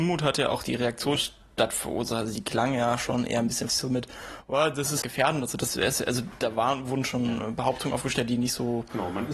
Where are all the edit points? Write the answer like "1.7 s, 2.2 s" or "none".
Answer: 1.2 s, 3.7 s, 5.0 s